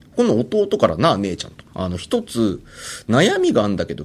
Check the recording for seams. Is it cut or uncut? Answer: cut